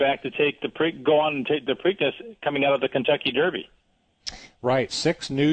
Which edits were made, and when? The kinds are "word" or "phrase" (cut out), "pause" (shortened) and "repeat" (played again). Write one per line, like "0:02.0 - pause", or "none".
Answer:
0:01.7 - word